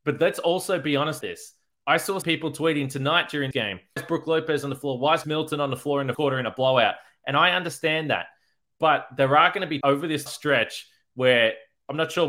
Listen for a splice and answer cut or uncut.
cut